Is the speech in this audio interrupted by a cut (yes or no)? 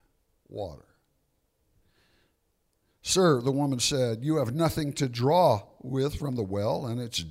no